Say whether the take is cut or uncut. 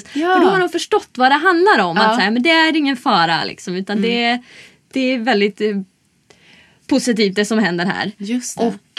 uncut